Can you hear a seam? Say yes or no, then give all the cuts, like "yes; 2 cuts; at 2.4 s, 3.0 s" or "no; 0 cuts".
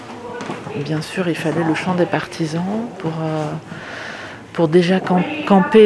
no; 0 cuts